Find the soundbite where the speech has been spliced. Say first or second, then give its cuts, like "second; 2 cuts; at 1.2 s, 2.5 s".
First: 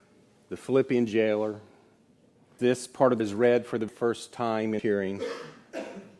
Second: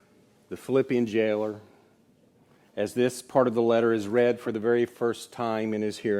first; 4 cuts; at 2.6 s, 3.2 s, 3.9 s, 4.8 s